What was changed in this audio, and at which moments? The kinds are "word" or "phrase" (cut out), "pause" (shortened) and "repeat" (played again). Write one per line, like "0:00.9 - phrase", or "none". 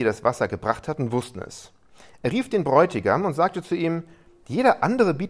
none

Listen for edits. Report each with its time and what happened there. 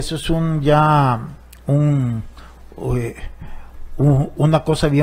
none

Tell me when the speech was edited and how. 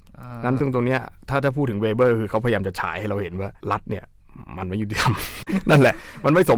0:03.6 - pause

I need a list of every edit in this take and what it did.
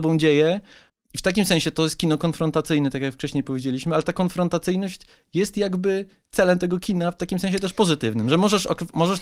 none

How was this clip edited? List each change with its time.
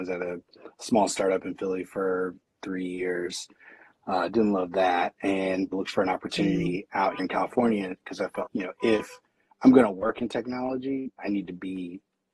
0:05.7 - word
0:07.2 - word
0:08.5 - word
0:11.2 - word

